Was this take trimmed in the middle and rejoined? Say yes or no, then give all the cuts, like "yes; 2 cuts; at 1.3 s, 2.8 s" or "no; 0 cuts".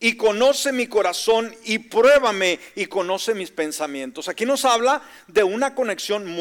no; 0 cuts